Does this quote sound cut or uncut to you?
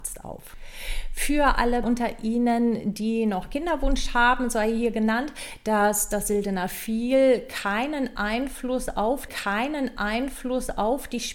cut